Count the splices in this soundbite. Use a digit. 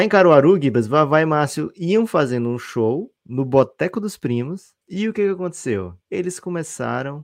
3